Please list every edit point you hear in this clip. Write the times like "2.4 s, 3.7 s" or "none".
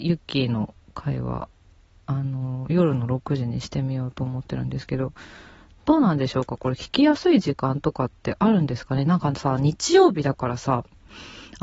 none